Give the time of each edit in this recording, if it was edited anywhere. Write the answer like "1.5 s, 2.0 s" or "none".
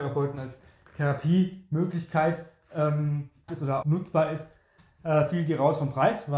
3.5 s, 3.8 s